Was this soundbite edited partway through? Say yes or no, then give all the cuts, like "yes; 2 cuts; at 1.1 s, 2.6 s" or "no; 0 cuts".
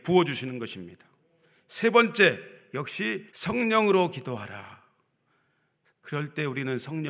yes; 1 cut; at 3.3 s